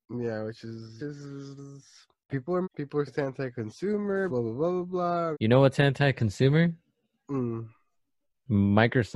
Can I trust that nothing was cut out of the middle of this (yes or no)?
no